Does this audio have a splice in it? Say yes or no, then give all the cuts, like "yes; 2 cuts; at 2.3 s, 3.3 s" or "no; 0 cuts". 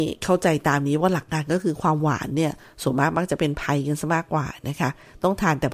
no; 0 cuts